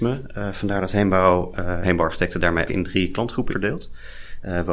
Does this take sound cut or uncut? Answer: cut